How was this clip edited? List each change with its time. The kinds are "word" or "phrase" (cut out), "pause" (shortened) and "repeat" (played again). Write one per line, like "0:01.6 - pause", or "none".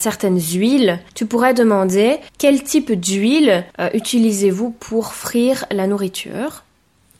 0:01.1 - pause
0:02.3 - pause
0:03.7 - pause